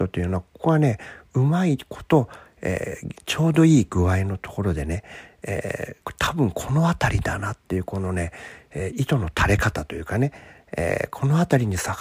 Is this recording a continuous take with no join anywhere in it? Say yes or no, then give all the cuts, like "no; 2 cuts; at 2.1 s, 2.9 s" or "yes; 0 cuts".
no; 2 cuts; at 3.2 s, 6.0 s